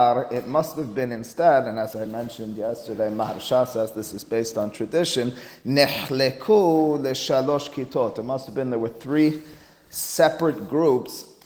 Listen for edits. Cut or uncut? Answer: uncut